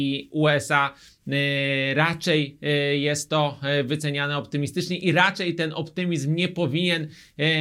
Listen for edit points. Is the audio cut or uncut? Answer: uncut